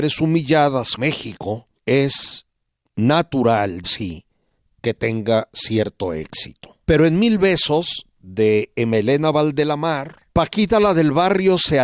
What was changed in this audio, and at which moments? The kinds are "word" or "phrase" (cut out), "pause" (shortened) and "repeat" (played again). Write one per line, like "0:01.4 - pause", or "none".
0:01.0 - word
0:01.8 - pause
0:03.8 - word
0:06.8 - pause
0:10.3 - pause